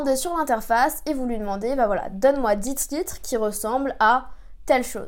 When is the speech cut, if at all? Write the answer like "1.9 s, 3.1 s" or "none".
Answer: none